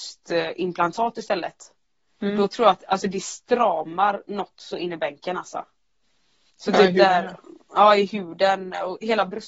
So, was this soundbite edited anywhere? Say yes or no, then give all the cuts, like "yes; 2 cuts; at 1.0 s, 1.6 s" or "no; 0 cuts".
no; 0 cuts